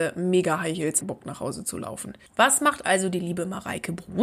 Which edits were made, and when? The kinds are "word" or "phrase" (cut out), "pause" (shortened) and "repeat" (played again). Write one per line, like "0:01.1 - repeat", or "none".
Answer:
0:01.0 - phrase
0:02.3 - pause